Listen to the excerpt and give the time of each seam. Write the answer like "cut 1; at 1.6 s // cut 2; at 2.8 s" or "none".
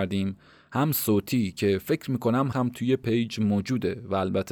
cut 1; at 2.5 s